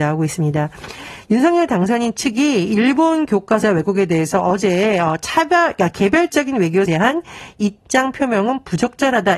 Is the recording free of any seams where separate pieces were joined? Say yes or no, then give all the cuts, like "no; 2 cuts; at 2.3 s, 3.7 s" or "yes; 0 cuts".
no; 2 cuts; at 3.6 s, 6.9 s